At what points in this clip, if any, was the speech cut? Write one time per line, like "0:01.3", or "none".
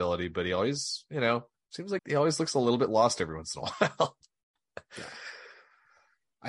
0:02.0